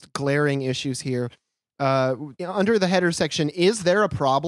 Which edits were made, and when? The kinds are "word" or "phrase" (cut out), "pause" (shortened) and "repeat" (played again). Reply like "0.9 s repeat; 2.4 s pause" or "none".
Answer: 2.4 s pause